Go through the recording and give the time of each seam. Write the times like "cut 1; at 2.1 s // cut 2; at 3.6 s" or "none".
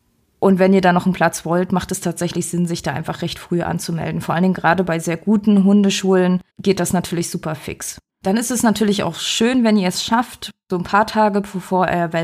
cut 1; at 6.5 s // cut 2; at 8.1 s